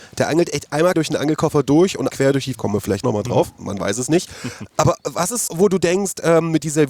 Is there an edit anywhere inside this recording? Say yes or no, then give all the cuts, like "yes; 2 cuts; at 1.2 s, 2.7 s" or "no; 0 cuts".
yes; 6 cuts; at 0.9 s, 2.1 s, 2.5 s, 3.0 s, 4.7 s, 5.5 s